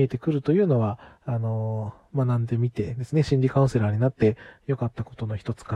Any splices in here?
no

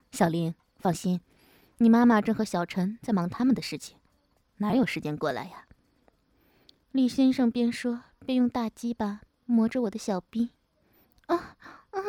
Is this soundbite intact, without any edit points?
yes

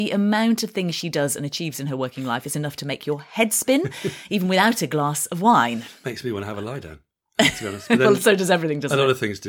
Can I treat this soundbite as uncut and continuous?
yes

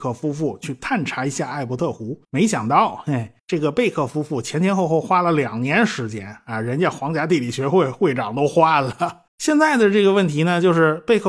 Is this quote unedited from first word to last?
no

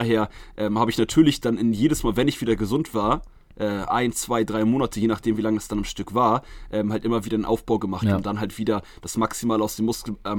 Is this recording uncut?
yes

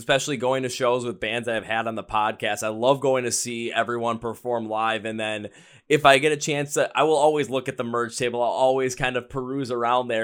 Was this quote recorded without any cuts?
yes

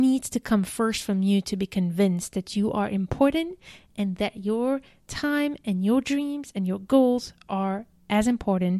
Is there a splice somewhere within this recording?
no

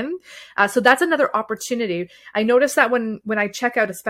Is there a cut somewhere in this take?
no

